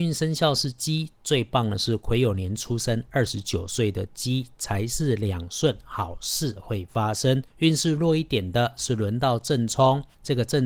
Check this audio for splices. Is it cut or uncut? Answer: cut